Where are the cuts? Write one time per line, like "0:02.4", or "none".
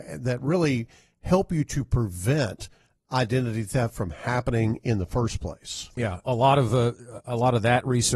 0:06.2

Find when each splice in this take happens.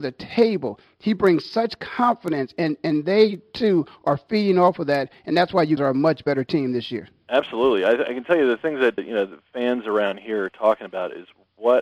0:05.8
0:09.0

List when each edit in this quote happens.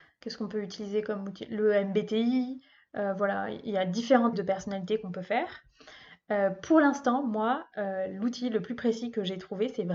0:04.3

